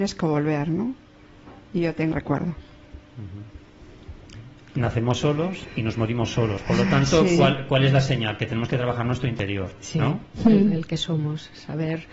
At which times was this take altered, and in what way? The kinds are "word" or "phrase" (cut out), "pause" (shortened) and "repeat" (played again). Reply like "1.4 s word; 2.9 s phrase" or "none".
2.1 s word